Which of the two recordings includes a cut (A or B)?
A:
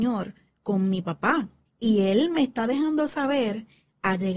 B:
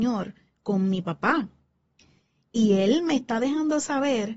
A